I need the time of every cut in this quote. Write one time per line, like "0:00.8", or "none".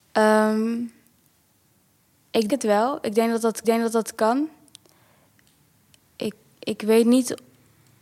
0:02.5
0:03.6